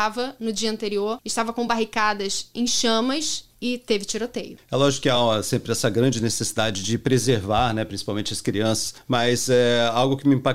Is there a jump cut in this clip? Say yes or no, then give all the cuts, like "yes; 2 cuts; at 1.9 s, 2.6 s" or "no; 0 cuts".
no; 0 cuts